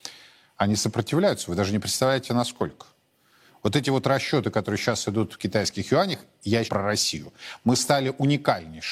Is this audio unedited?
no; 2 cuts; at 3.1 s, 6.7 s

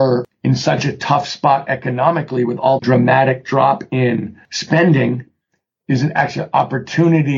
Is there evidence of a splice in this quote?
yes; 1 cut; at 2.8 s

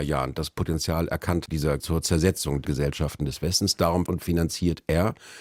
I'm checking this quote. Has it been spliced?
yes; 4 cuts; at 1.5 s, 1.8 s, 2.6 s, 4.1 s

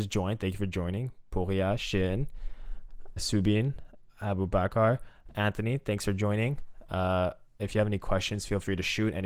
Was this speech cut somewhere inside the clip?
yes; 1 cut; at 3.2 s

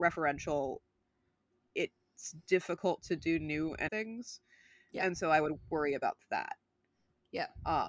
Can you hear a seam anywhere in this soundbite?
yes; 1 cut; at 3.9 s

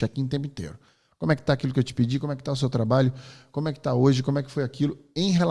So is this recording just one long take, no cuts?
yes; 0 cuts

